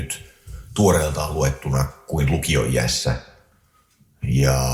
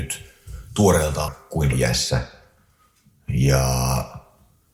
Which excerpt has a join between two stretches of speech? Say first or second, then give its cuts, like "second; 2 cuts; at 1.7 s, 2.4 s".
second; 2 cuts; at 1.3 s, 1.7 s